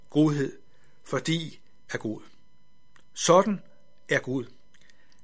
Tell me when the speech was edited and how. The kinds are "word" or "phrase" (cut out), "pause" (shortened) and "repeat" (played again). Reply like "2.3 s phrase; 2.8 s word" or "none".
1.9 s word